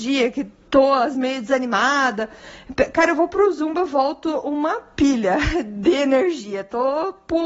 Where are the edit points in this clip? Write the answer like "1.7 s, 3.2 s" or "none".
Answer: 1.1 s